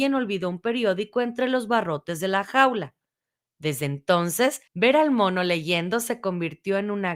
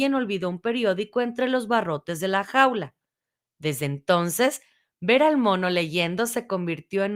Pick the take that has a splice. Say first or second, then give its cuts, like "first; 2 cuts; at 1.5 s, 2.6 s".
first; 1 cut; at 4.7 s